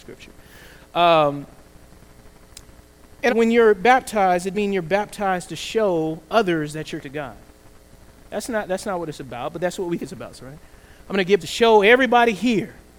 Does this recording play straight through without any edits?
no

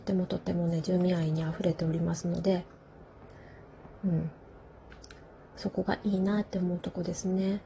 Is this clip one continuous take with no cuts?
yes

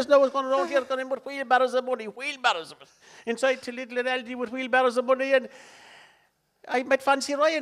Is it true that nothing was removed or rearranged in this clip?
yes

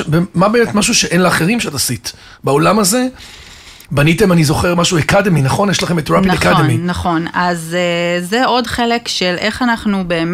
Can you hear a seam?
no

